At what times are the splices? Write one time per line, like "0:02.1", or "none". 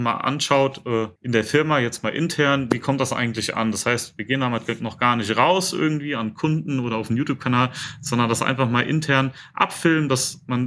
0:01.2